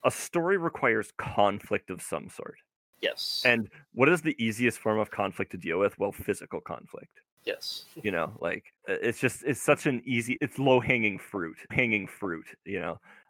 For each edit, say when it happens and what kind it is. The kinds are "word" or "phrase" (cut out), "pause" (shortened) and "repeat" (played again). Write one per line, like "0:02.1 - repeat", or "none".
0:08.8 - pause
0:10.4 - word
0:11.7 - repeat

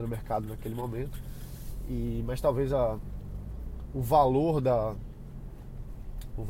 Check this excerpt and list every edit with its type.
none

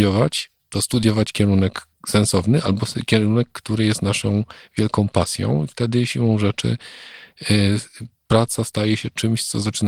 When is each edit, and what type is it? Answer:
none

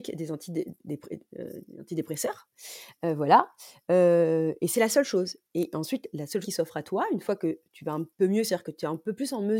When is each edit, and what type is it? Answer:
0:05.5 - pause
0:06.4 - word
0:08.1 - pause

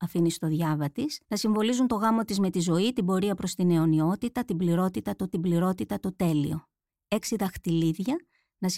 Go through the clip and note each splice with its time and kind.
0:01.2 - pause
0:05.3 - repeat

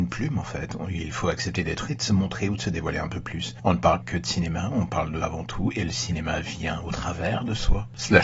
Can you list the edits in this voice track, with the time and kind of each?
0:01.9 - phrase
0:04.0 - word
0:05.2 - word

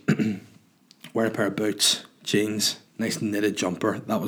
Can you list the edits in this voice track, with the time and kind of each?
0:02.9 - pause

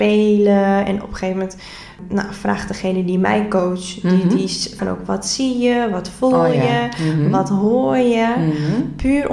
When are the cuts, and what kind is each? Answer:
0:04.8 - word

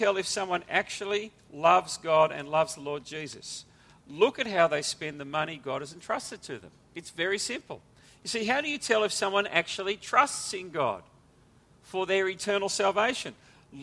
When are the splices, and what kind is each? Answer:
none

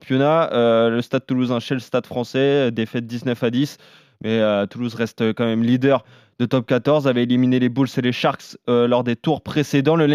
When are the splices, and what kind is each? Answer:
none

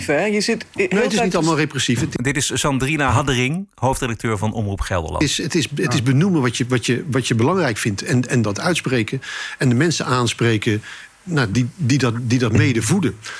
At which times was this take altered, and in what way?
none

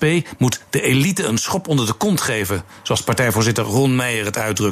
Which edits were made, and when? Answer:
none

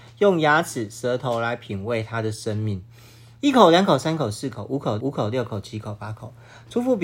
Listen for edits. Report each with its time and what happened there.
0:05.0 - repeat

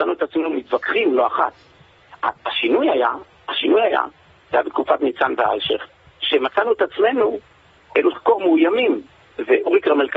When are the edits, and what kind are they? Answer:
0:08.1 - word

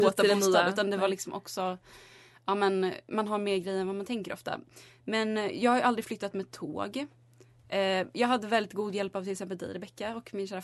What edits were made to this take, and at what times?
none

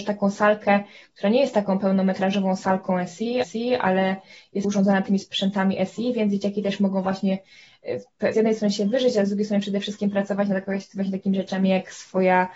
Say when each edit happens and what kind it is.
0:03.4 - repeat
0:04.6 - word
0:08.3 - word

